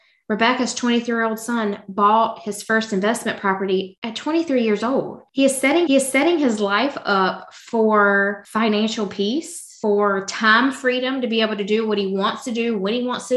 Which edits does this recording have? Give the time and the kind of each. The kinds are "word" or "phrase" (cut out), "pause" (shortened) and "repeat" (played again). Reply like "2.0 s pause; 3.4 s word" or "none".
5.9 s repeat

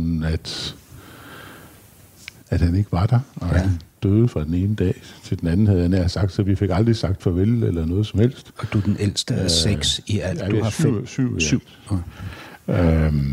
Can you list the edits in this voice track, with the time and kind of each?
2.4 s word; 5.2 s pause

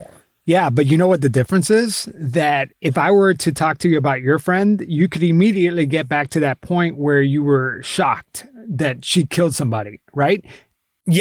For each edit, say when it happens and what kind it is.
2.7 s word

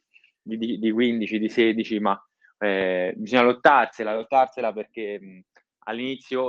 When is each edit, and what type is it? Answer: none

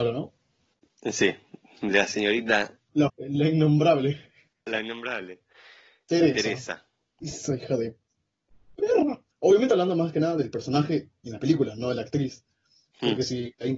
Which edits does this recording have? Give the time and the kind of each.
3.1 s word; 9.3 s pause

